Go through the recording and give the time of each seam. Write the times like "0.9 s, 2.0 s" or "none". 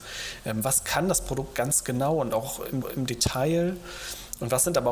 2.8 s